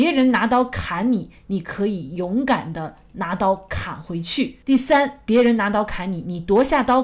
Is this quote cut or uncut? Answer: cut